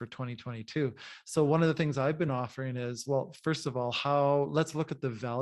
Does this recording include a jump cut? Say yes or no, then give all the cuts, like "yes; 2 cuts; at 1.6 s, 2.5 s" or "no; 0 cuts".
no; 0 cuts